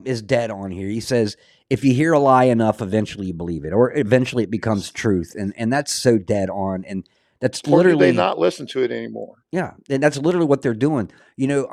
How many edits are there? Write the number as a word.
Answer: zero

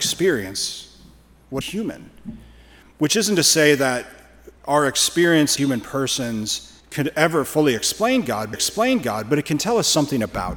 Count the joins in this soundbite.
five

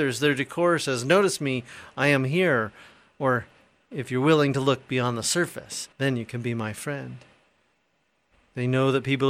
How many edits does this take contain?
one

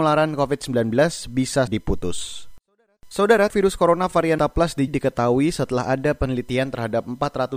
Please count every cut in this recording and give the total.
four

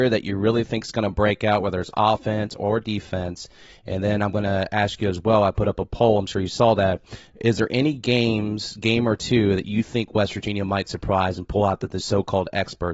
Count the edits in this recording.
zero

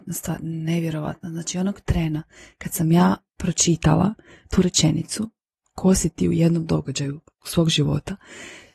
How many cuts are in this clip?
zero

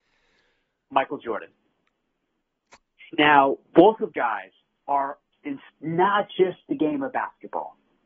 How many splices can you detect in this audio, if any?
four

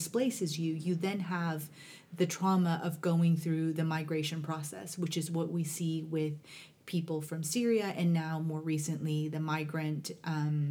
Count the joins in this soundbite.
zero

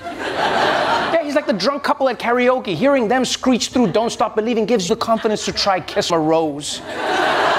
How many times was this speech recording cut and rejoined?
two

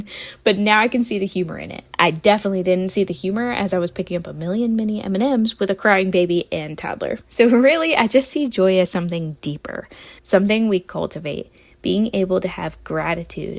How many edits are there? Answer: three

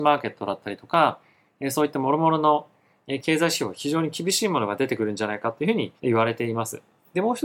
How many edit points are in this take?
one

